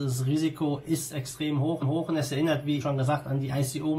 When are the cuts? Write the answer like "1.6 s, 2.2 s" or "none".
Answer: 1.8 s, 2.8 s